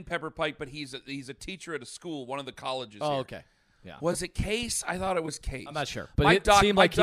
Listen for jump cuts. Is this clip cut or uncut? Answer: uncut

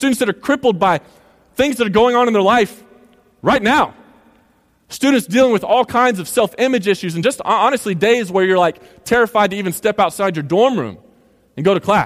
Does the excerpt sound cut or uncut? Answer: uncut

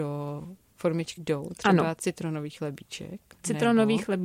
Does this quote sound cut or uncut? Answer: cut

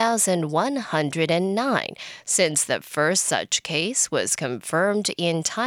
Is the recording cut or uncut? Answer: uncut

